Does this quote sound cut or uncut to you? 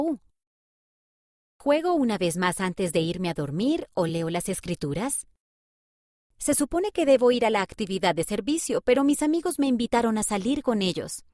uncut